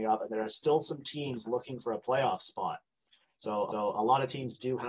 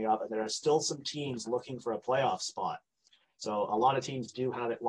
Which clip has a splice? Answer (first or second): first